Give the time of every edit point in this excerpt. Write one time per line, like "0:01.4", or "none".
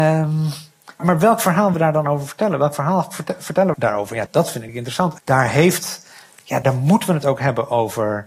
0:01.0
0:01.7
0:03.7
0:04.3
0:04.7
0:05.2
0:06.6